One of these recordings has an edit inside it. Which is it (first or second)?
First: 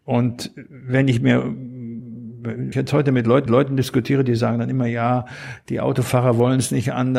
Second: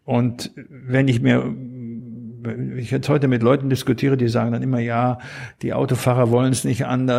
first